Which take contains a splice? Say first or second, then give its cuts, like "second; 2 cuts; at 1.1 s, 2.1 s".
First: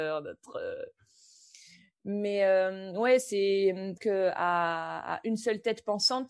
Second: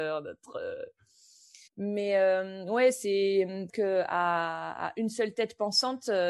second; 1 cut; at 1.7 s